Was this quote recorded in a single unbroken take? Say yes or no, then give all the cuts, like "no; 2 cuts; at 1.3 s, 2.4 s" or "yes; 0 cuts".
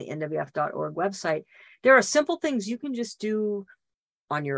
yes; 0 cuts